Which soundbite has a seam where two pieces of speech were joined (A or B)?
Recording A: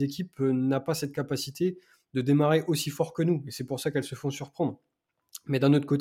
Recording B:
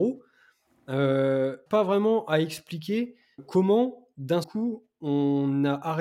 B